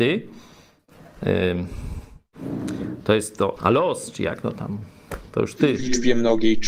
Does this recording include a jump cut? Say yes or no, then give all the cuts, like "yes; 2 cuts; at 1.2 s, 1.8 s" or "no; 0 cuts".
yes; 1 cut; at 3.6 s